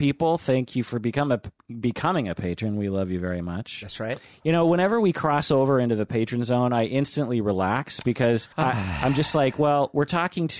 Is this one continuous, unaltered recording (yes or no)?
no